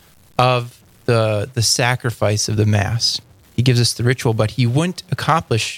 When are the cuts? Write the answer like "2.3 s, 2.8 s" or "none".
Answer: none